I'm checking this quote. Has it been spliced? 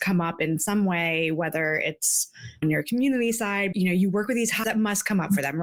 yes; 3 cuts; at 2.6 s, 3.7 s, 4.6 s

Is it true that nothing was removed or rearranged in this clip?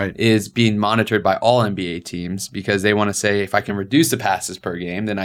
yes; 0 cuts

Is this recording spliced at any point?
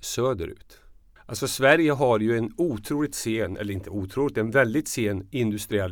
yes; 1 cut; at 1.2 s

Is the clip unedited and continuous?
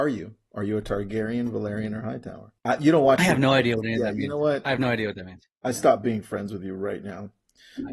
no; 1 cut; at 2.6 s

